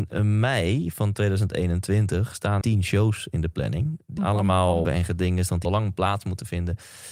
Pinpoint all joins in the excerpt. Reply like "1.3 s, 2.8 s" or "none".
2.6 s, 4.2 s, 4.8 s, 5.6 s